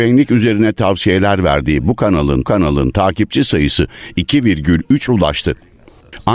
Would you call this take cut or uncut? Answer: cut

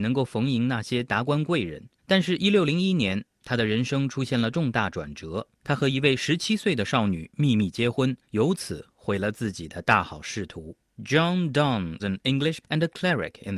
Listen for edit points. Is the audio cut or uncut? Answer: cut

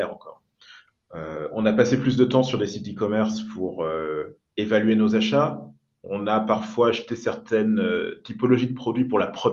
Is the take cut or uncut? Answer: uncut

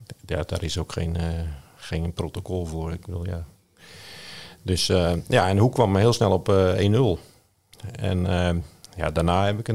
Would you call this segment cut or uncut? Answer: uncut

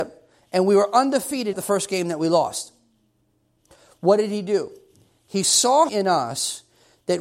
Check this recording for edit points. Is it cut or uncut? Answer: cut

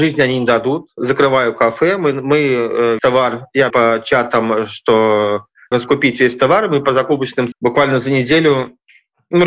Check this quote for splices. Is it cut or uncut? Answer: cut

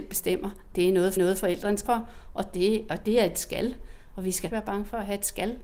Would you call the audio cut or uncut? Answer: cut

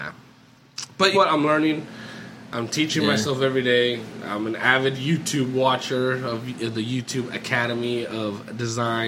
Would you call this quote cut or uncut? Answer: cut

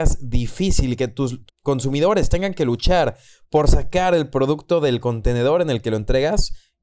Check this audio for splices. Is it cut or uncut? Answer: cut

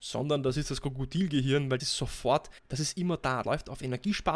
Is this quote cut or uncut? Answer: cut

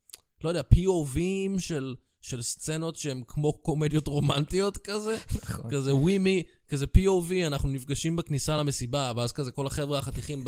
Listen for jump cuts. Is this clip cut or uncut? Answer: uncut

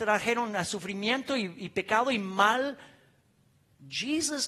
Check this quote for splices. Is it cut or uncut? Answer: uncut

